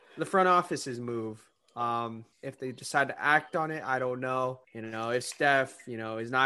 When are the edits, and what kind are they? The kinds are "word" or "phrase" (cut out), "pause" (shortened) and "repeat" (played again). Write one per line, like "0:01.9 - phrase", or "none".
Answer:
0:02.3 - pause
0:04.6 - pause